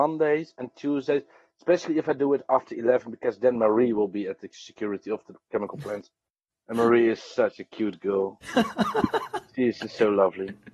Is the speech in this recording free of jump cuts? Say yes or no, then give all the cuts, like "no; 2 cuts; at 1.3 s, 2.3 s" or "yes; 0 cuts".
yes; 0 cuts